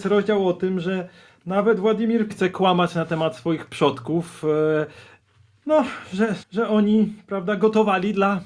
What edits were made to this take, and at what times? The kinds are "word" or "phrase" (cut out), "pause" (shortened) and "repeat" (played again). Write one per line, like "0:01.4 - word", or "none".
0:02.3 - word
0:06.4 - word